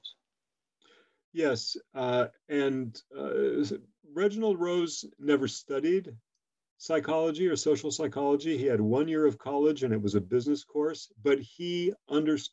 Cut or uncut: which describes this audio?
uncut